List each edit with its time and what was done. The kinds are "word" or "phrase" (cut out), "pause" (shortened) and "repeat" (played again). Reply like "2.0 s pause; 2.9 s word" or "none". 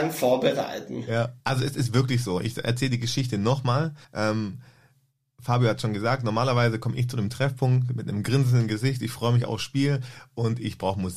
1.4 s pause; 4.0 s pause